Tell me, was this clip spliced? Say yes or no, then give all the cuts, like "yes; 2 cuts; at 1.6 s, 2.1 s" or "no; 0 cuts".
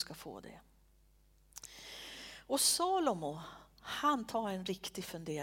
no; 0 cuts